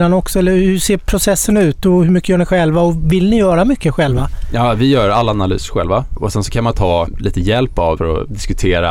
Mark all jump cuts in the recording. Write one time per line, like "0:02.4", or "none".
0:08.0